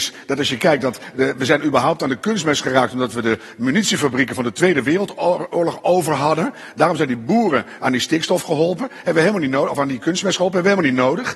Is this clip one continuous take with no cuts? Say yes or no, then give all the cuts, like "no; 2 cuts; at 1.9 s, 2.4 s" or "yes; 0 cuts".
yes; 0 cuts